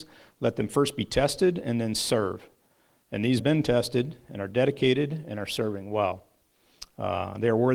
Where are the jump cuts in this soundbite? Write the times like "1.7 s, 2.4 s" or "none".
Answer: 3.4 s